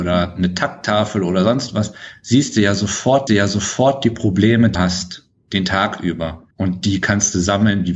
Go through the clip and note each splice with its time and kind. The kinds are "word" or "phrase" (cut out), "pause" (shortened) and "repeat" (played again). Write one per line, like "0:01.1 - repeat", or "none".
0:03.3 - repeat
0:04.7 - word
0:06.5 - pause